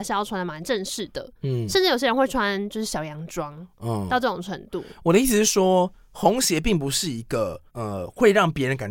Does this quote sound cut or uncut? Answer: cut